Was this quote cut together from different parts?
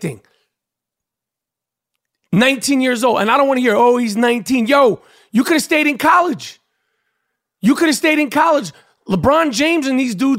no; 0 cuts

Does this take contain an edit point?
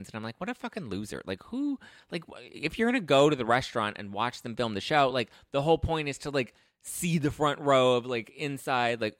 no; 0 cuts

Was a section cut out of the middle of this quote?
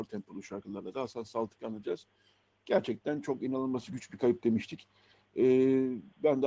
no; 0 cuts

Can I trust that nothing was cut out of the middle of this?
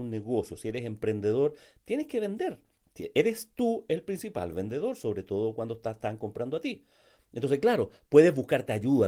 yes; 0 cuts

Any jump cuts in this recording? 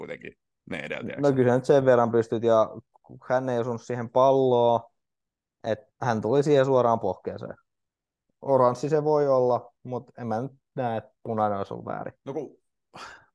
yes; 3 cuts; at 5.9 s, 7.9 s, 12.2 s

